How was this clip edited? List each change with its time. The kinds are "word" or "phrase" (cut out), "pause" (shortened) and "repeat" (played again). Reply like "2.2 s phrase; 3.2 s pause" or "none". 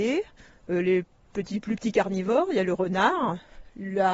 none

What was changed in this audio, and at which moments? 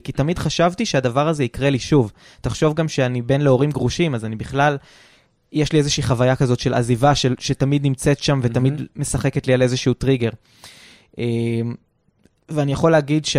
none

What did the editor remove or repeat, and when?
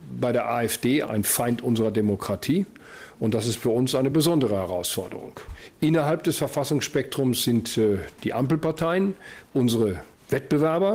none

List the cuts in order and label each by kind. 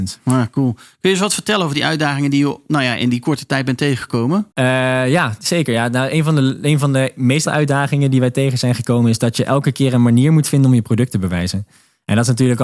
4.5 s pause; 7.4 s word

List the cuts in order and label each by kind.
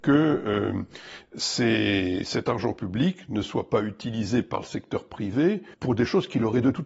5.7 s pause

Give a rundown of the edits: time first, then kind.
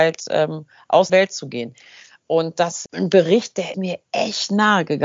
1.1 s word; 2.9 s word; 3.7 s word

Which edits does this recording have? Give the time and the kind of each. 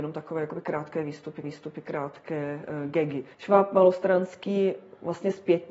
1.4 s repeat; 3.3 s pause

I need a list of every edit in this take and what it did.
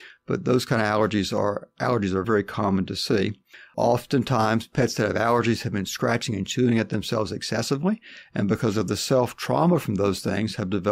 2.2 s word

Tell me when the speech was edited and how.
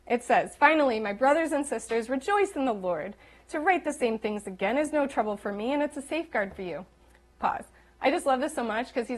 none

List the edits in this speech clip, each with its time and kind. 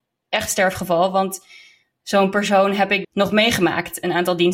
3.0 s word

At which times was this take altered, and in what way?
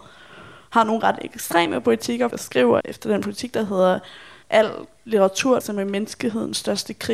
2.3 s phrase; 2.8 s word; 4.4 s pause; 5.6 s phrase

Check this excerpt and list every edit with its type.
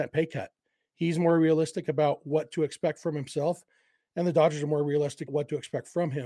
5.3 s word

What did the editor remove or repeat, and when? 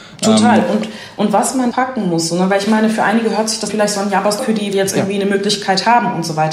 1.7 s word; 3.7 s word; 4.4 s phrase; 4.7 s phrase

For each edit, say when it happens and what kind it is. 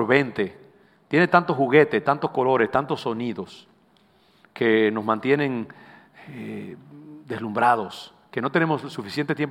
none

